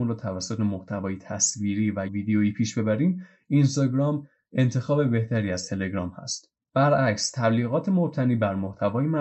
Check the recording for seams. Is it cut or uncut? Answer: cut